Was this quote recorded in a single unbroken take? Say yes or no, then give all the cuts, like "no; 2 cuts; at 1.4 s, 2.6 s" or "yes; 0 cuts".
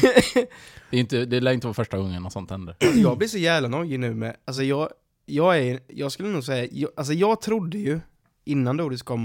yes; 0 cuts